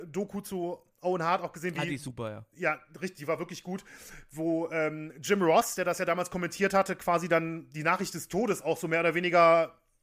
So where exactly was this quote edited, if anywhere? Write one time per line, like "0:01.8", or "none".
none

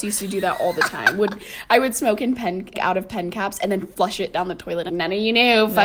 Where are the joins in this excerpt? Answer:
0:02.7
0:04.9

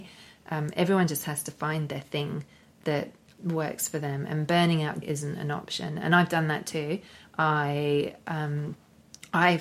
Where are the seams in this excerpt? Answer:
0:05.0

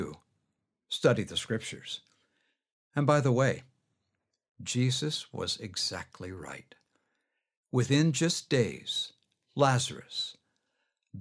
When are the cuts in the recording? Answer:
none

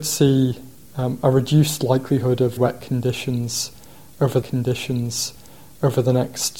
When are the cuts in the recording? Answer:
0:02.6
0:04.4

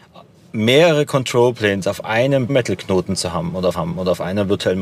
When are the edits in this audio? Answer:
0:02.5
0:03.7

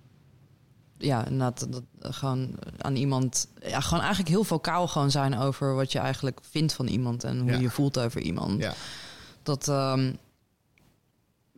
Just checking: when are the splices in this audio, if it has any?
none

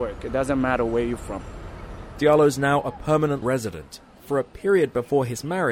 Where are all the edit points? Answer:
0:03.4
0:04.1

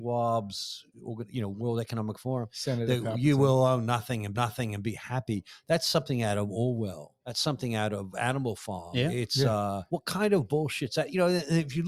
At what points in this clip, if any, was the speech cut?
0:04.3
0:07.2
0:09.9

